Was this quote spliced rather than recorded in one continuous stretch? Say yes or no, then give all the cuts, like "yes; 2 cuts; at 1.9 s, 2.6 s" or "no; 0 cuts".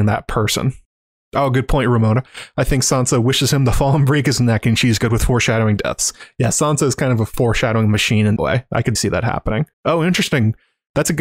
yes; 3 cuts; at 8.4 s, 9.0 s, 9.7 s